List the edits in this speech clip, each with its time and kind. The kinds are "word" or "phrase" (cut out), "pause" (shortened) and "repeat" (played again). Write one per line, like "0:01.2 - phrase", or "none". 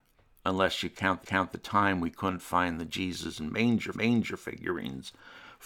0:01.2 - repeat
0:03.9 - repeat